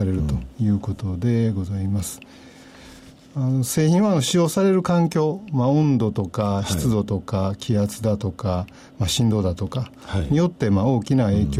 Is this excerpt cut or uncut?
uncut